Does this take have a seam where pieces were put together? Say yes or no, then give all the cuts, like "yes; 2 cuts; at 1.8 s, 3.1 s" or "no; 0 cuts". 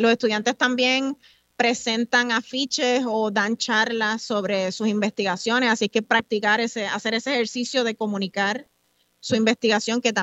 yes; 1 cut; at 6.0 s